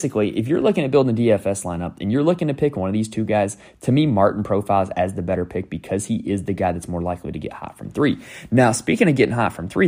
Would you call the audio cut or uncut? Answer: uncut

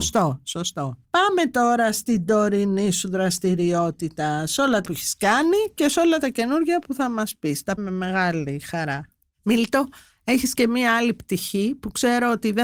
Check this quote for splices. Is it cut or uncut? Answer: cut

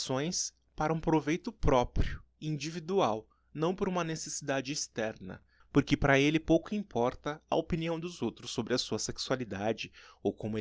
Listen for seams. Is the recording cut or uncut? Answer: uncut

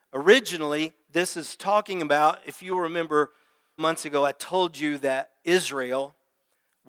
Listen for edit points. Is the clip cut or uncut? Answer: cut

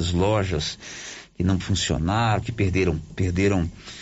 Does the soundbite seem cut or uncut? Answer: cut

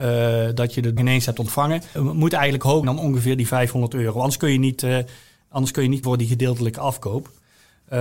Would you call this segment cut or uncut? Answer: cut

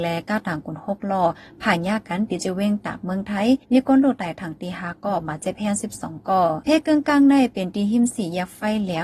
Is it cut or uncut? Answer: cut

